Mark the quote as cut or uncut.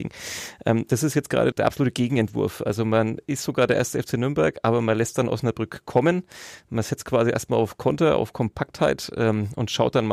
cut